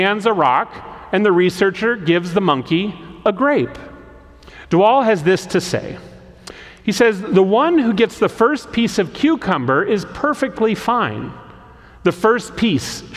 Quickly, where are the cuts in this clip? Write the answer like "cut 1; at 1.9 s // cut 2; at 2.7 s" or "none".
none